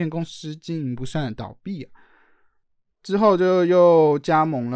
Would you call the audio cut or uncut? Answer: uncut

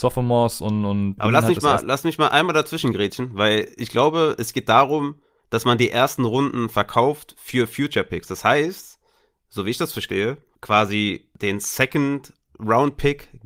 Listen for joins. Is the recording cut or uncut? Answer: cut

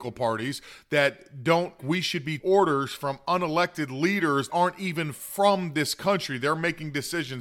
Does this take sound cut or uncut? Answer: cut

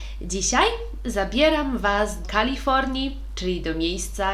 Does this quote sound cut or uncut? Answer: cut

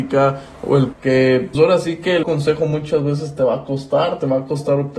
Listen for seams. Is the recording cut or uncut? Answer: cut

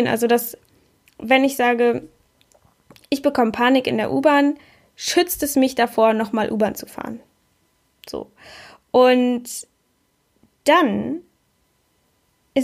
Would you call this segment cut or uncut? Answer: uncut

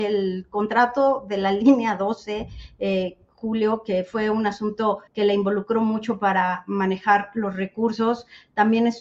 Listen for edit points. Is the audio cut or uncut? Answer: cut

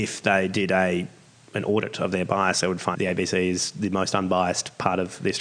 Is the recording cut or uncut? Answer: cut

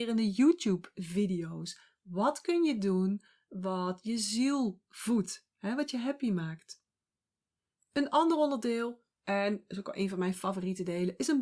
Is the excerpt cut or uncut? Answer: uncut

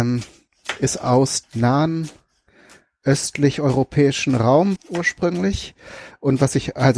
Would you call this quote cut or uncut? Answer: cut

